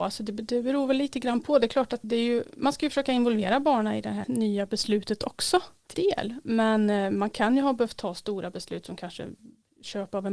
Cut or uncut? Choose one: cut